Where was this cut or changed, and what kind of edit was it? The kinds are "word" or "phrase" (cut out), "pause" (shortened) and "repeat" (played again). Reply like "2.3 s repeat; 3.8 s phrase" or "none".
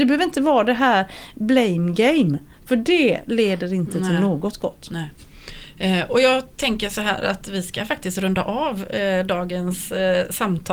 6.5 s pause